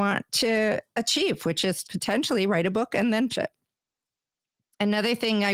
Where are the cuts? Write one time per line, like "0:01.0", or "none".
0:01.8
0:03.3